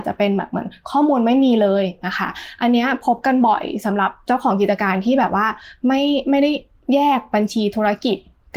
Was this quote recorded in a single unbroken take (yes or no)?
yes